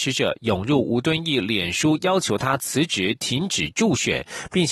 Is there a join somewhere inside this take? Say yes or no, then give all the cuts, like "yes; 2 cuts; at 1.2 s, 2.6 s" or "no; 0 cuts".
no; 0 cuts